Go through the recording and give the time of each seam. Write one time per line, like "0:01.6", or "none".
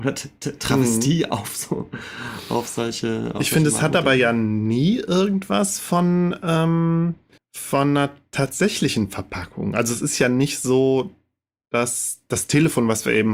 0:07.4